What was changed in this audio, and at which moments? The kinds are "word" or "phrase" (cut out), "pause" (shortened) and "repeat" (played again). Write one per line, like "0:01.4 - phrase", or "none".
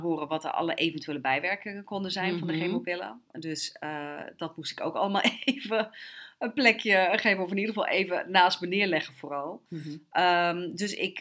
none